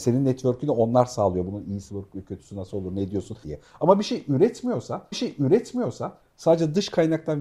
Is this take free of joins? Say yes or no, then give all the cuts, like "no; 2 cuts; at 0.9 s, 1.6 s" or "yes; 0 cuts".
no; 3 cuts; at 1.9 s, 3.4 s, 5.1 s